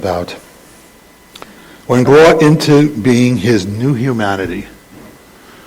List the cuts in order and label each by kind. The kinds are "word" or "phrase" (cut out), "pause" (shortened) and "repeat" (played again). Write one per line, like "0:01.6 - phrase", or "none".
0:02.0 - word